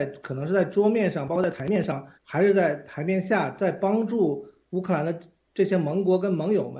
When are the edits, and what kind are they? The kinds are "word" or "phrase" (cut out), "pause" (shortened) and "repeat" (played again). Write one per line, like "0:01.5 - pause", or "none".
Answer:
0:02.2 - pause